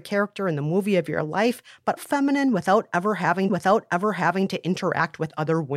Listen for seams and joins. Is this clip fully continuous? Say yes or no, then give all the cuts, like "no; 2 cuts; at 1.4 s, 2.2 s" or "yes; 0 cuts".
no; 2 cuts; at 2.0 s, 3.5 s